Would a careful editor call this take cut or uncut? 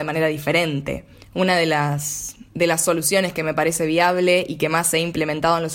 cut